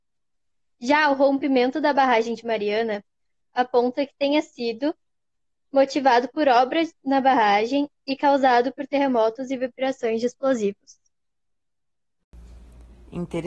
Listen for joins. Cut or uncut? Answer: uncut